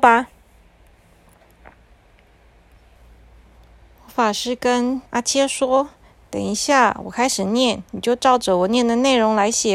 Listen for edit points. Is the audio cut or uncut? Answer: cut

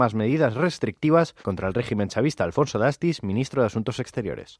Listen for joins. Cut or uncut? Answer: cut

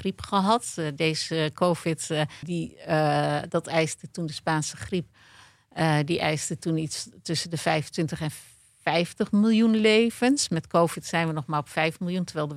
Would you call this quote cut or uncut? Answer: cut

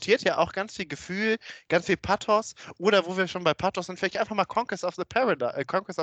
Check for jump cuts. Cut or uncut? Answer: uncut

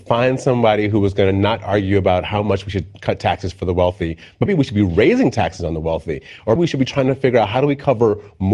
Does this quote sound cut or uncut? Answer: cut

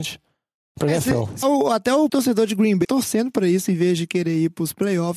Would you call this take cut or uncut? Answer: cut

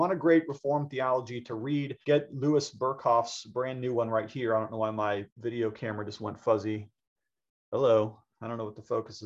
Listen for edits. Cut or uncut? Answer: cut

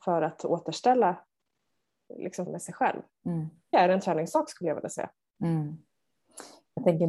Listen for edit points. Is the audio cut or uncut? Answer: cut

